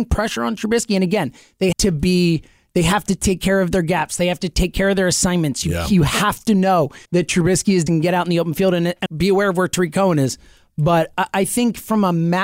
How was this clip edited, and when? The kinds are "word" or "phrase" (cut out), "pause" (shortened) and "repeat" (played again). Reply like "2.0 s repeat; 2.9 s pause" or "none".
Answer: 1.7 s word; 7.0 s pause; 7.9 s word; 9.1 s word